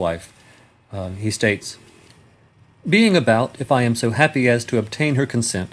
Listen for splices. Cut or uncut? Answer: uncut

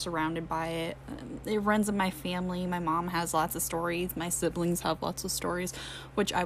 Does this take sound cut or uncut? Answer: uncut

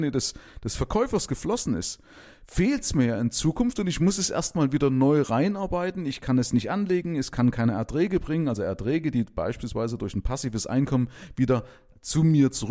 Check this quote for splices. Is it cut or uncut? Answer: uncut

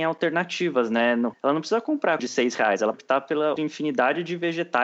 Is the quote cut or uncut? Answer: cut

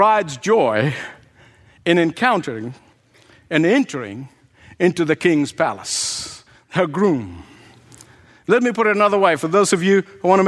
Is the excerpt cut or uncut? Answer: uncut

